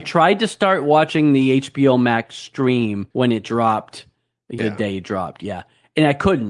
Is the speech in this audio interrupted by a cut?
yes; 2 cuts; at 3.1 s, 4.6 s

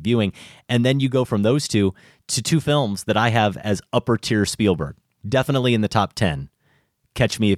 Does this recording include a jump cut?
no; 0 cuts

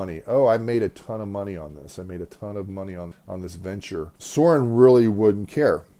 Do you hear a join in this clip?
yes; 2 cuts; at 3.1 s, 4.2 s

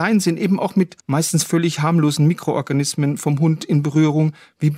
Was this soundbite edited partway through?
yes; 1 cut; at 1.0 s

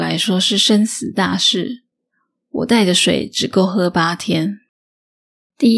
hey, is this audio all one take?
yes; 0 cuts

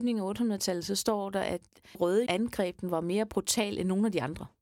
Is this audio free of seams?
no; 2 cuts; at 1.9 s, 2.3 s

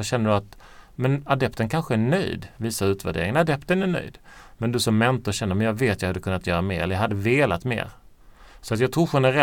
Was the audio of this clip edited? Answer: no; 0 cuts

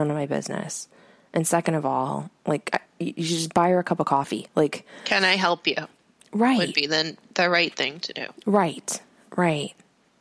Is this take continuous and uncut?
yes; 0 cuts

